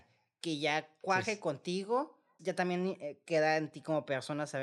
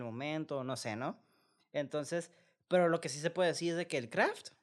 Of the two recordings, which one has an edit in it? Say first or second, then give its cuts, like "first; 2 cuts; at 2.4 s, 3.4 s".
first; 1 cut; at 2.4 s